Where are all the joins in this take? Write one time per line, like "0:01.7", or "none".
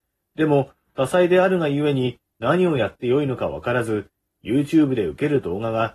none